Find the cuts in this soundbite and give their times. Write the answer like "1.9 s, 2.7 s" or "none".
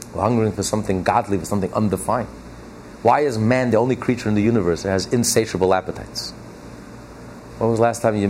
none